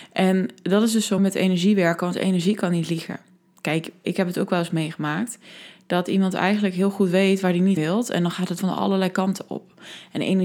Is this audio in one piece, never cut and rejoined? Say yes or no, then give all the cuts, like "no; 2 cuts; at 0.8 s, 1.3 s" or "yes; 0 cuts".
no; 4 cuts; at 1.2 s, 4.0 s, 7.8 s, 8.6 s